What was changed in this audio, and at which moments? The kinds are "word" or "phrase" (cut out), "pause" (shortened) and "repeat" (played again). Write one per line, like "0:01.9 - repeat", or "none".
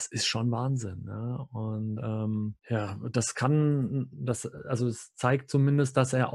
0:02.6 - pause